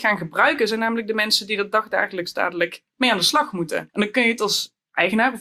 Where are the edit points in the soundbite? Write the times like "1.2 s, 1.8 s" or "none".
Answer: 2.9 s, 3.9 s